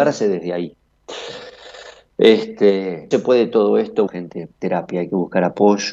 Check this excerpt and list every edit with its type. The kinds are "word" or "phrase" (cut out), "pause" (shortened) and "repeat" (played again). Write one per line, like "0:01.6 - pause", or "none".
0:03.1 - phrase
0:04.1 - word